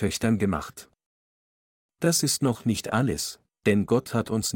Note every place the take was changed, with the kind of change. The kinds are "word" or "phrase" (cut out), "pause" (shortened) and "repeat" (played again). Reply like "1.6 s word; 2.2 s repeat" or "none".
none